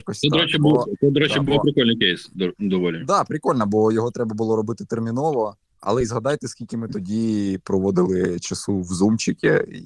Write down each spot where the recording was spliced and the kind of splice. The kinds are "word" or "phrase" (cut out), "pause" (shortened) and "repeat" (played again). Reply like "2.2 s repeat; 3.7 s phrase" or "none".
5.7 s pause